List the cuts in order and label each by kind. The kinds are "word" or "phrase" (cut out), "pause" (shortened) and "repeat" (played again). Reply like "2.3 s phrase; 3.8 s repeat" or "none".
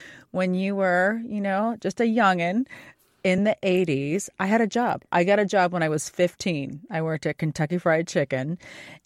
none